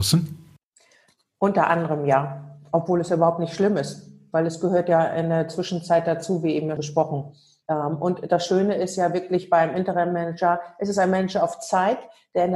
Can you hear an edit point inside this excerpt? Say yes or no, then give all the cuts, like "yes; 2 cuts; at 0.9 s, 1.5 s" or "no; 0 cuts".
yes; 1 cut; at 6.8 s